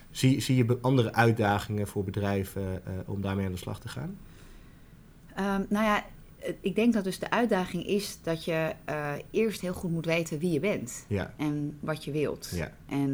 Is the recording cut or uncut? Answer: uncut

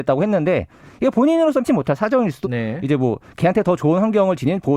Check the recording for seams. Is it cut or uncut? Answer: cut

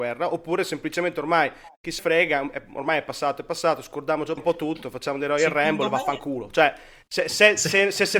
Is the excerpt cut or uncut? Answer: cut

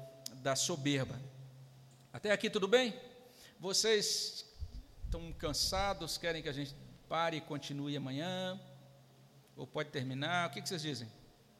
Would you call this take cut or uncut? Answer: uncut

